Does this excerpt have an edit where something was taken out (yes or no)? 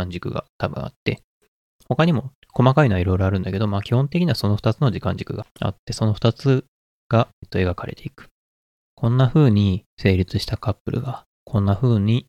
no